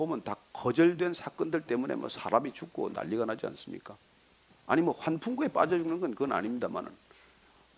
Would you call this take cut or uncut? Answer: uncut